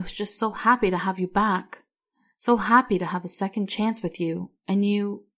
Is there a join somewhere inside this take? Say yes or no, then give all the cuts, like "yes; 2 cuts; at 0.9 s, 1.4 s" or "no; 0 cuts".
no; 0 cuts